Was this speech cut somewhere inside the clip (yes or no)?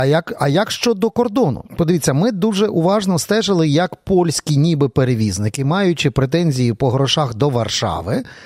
yes